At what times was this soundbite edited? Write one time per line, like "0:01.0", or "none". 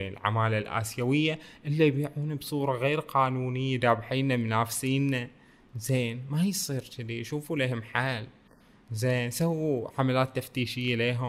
none